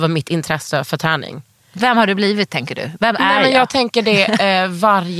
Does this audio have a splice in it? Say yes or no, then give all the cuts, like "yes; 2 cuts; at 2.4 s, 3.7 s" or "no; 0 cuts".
no; 0 cuts